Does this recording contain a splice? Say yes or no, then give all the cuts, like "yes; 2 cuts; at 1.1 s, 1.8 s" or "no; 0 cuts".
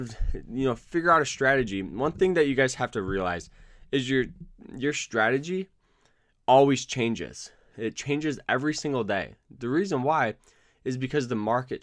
no; 0 cuts